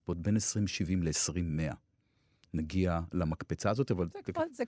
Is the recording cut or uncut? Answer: uncut